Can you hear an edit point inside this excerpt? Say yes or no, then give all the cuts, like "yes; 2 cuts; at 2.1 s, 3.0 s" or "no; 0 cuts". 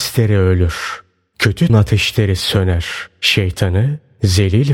yes; 1 cut; at 1.7 s